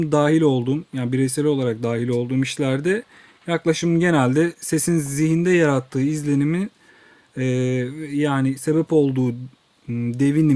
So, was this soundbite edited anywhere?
no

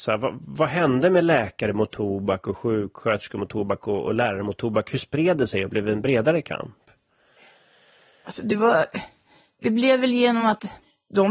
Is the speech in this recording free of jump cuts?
yes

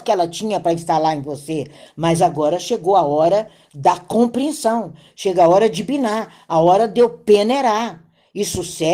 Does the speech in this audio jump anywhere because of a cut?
no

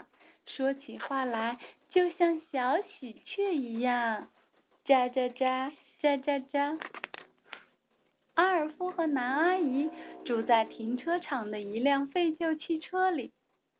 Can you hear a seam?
no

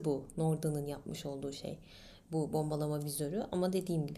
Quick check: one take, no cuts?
yes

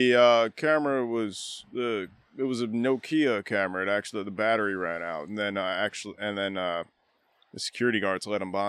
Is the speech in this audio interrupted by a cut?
no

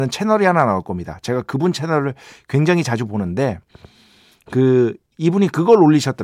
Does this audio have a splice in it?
no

